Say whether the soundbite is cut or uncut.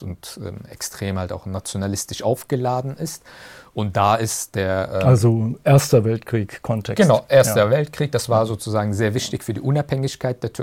uncut